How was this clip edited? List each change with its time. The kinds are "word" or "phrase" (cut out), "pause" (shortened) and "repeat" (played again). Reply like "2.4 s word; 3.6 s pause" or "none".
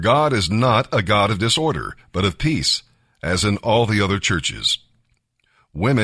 none